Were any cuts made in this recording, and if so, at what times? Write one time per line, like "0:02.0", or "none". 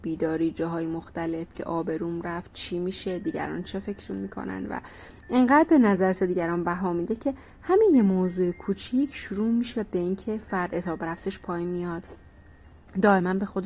none